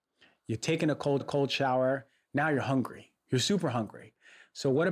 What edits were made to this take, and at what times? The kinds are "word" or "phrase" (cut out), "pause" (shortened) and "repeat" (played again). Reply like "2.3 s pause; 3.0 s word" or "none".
1.2 s repeat